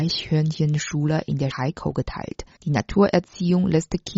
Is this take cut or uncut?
cut